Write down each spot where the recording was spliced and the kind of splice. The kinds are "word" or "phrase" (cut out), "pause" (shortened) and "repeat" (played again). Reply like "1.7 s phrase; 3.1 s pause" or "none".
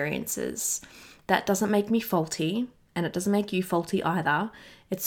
none